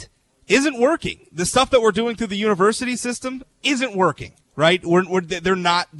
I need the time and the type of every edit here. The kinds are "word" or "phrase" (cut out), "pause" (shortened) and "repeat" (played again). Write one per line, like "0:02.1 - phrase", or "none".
0:03.5 - pause
0:04.4 - pause